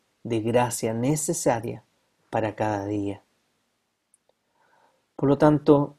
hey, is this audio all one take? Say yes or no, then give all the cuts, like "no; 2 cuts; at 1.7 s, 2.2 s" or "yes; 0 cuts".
yes; 0 cuts